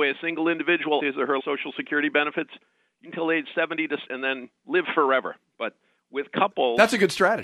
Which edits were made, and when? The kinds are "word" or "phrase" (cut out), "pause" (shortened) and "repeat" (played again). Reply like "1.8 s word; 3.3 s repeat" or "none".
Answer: 1.0 s word; 1.4 s word; 3.0 s word; 4.1 s word

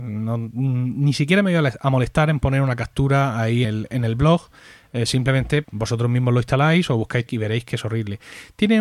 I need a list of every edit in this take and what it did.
3.6 s word; 5.6 s word; 7.3 s word

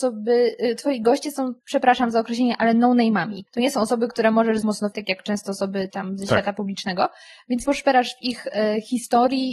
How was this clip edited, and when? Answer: 1.6 s pause; 3.5 s pause; 4.6 s word; 4.9 s word; 5.9 s word; 7.6 s word

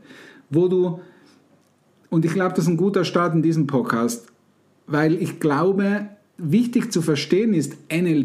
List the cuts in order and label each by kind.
none

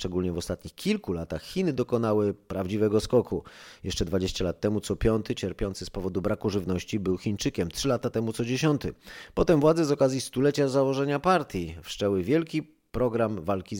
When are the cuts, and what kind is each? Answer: none

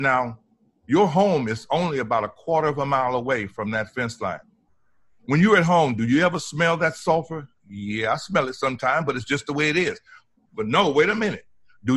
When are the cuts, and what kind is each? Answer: none

